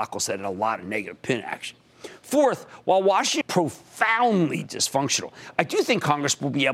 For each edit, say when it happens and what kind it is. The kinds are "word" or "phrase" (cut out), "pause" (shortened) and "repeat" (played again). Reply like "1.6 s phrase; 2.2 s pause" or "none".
3.4 s phrase